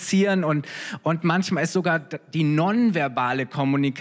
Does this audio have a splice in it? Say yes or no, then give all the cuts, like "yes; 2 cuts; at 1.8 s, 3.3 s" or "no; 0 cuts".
no; 0 cuts